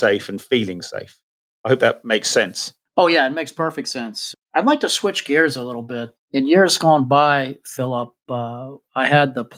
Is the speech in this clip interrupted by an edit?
yes; 2 cuts; at 4.3 s, 6.2 s

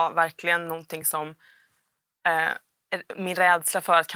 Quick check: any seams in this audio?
no; 0 cuts

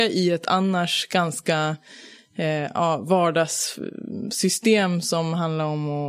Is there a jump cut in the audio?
no; 0 cuts

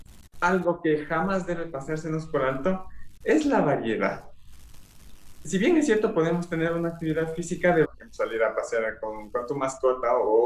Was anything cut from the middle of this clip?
yes; 1 cut; at 7.8 s

